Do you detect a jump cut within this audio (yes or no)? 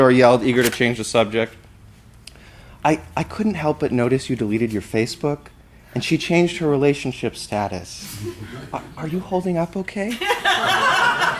no